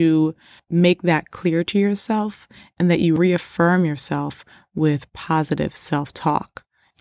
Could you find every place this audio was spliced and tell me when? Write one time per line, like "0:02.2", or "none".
none